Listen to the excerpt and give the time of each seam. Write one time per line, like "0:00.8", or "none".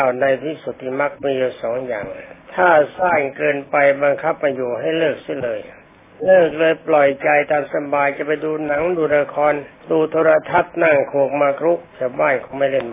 0:02.4
0:05.8
0:09.7
0:11.9